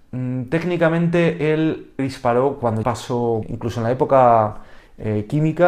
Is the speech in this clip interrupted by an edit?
yes; 3 cuts; at 2.0 s, 2.8 s, 3.4 s

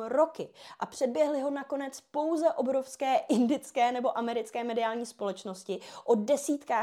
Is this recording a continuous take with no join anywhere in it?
yes; 0 cuts

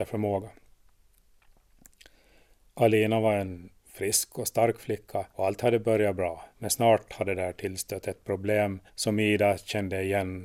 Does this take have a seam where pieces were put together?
yes; 3 cuts; at 5.3 s, 6.5 s, 8.9 s

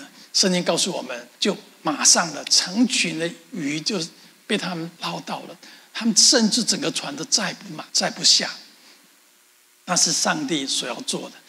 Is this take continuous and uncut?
no; 3 cuts; at 1.3 s, 5.0 s, 7.9 s

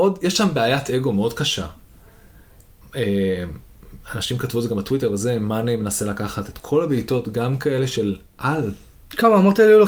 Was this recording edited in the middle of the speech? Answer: no; 0 cuts

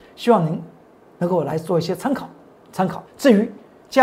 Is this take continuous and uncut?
no; 1 cut; at 3.1 s

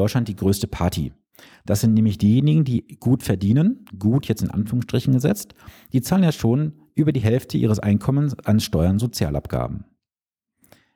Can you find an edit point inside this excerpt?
no; 0 cuts

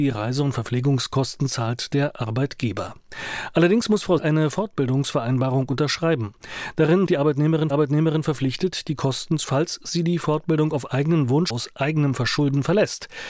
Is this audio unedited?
no; 5 cuts; at 4.2 s, 7.1 s, 7.7 s, 9.4 s, 11.5 s

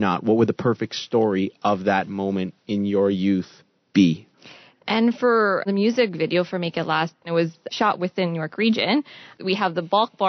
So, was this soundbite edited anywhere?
no; 0 cuts

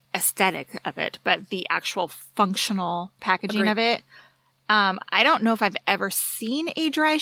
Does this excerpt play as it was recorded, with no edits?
yes; 0 cuts

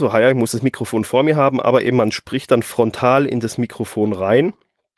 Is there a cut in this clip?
no; 0 cuts

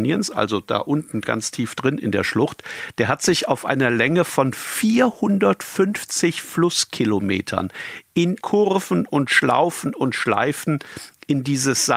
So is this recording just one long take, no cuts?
no; 1 cut; at 8.4 s

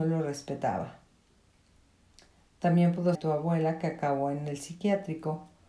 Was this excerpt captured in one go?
no; 1 cut; at 3.1 s

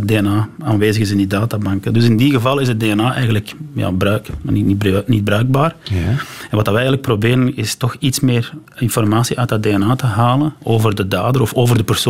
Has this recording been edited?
no; 0 cuts

